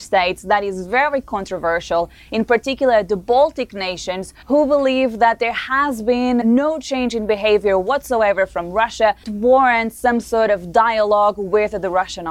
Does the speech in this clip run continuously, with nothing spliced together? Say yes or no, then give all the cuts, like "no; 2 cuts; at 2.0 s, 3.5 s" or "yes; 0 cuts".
no; 3 cuts; at 4.4 s, 6.4 s, 9.2 s